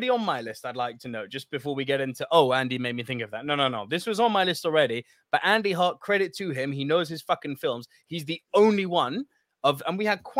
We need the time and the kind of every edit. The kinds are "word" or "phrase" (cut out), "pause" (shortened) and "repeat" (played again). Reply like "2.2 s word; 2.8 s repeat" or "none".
none

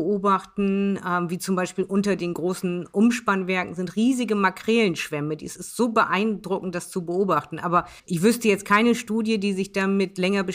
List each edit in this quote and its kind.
8.0 s pause

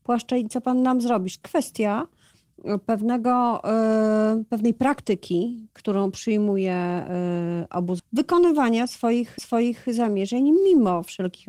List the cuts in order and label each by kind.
1.4 s word; 8.0 s word; 9.4 s repeat

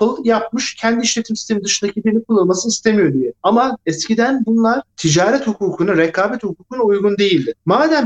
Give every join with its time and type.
none

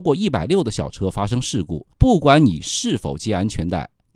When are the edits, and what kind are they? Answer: 1.9 s pause

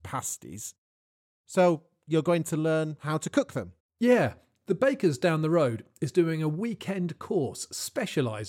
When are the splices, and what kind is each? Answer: 3.8 s pause

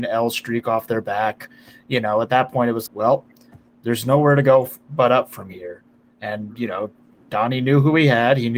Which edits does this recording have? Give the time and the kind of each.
2.9 s word

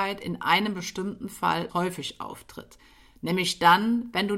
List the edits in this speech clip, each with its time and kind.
1.7 s phrase

